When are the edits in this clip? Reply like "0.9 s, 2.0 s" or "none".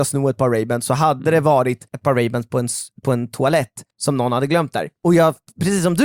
1.9 s, 3.9 s, 5.0 s